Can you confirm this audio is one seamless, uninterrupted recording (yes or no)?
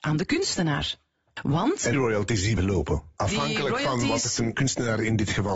no